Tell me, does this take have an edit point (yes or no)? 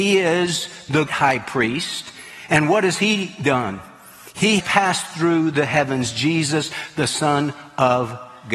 yes